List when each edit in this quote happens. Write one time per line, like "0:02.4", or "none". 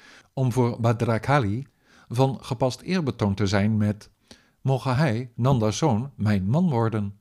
none